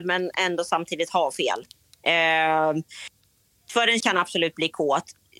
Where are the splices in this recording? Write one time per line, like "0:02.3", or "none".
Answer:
0:04.0

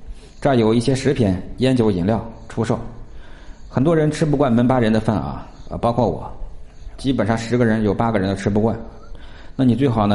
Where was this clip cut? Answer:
0:07.0

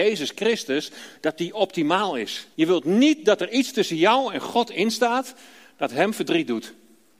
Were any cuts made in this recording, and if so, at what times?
0:02.5

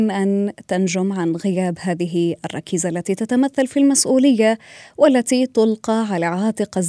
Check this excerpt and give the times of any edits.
none

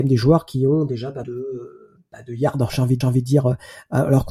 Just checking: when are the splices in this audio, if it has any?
0:01.2
0:03.0

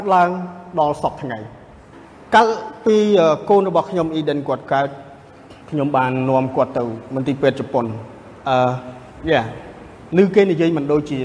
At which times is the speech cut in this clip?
0:01.9
0:05.6
0:08.4
0:10.1

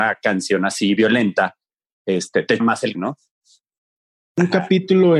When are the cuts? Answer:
0:01.0
0:02.6
0:02.9

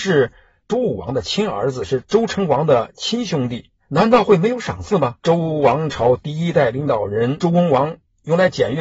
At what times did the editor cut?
0:03.8
0:05.2

